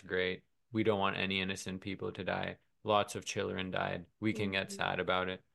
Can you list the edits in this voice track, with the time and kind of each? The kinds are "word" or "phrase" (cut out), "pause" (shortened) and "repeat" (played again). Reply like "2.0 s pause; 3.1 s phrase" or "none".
4.1 s pause